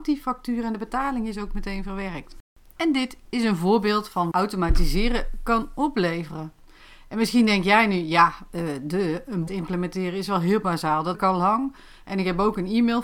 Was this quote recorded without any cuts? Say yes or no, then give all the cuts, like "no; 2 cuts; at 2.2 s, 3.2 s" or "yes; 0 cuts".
no; 3 cuts; at 4.3 s, 9.5 s, 11.1 s